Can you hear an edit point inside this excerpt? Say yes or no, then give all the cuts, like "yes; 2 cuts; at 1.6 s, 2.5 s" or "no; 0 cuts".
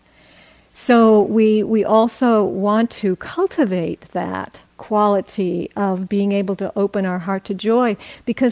no; 0 cuts